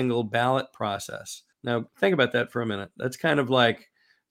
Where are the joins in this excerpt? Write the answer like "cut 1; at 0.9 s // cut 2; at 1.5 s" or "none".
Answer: cut 1; at 1.5 s